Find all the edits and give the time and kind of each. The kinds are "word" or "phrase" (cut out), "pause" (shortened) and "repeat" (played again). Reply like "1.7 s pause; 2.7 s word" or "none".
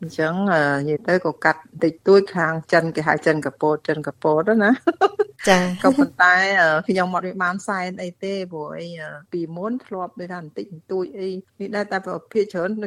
9.2 s pause; 11.5 s pause